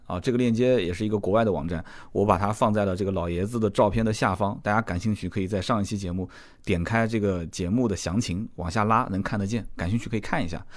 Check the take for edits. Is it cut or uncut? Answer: uncut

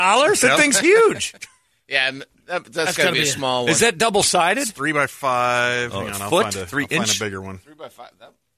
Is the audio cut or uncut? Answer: uncut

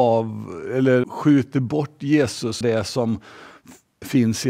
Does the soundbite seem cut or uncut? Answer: cut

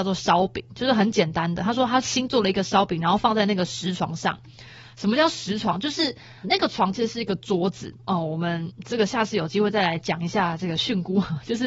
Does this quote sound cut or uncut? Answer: cut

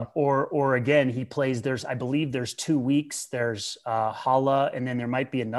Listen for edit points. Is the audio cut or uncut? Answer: uncut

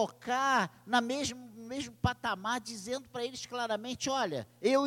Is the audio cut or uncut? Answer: uncut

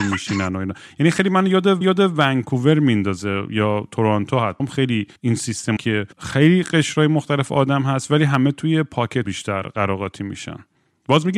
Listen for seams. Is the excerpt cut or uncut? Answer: cut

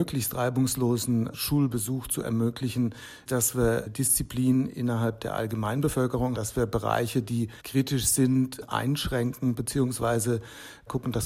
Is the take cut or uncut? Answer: cut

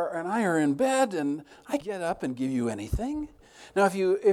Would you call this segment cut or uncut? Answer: cut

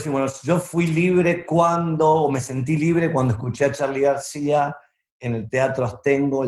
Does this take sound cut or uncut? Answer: uncut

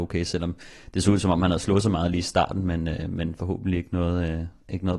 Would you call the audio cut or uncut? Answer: uncut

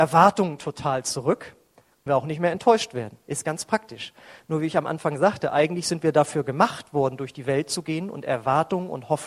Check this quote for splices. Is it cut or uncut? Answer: cut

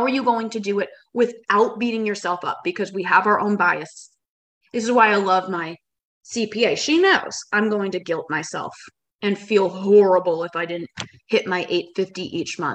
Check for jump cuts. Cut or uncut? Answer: uncut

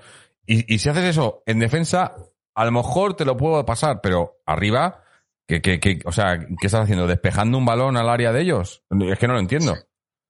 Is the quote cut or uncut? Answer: uncut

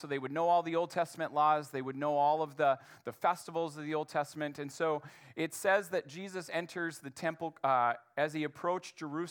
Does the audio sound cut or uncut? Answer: uncut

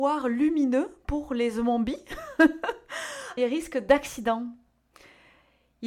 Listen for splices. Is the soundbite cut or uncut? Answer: cut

